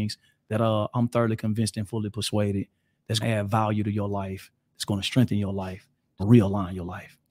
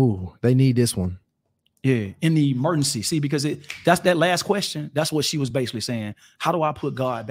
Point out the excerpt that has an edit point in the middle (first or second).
first